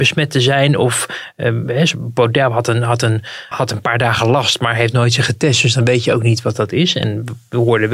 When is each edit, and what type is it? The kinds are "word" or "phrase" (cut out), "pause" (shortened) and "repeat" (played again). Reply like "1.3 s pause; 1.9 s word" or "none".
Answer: 3.5 s word